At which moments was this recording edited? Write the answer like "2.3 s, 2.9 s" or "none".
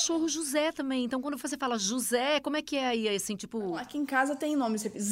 none